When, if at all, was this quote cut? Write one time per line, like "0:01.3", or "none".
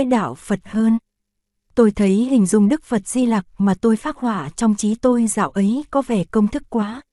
none